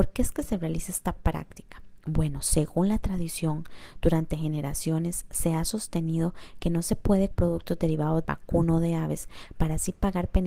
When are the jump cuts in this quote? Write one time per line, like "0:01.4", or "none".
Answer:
0:07.3
0:08.2